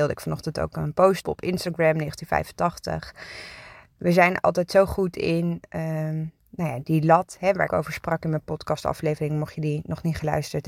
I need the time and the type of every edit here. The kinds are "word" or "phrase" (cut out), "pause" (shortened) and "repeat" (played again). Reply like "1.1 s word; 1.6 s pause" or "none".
1.2 s word; 6.4 s pause; 7.7 s phrase